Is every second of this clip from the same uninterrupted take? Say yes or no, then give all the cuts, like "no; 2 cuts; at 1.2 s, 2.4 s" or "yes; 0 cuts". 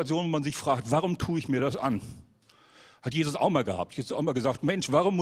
yes; 0 cuts